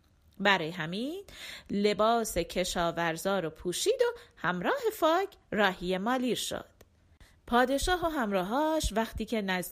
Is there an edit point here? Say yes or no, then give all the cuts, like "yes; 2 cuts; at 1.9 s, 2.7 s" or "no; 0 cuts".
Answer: yes; 1 cut; at 7.3 s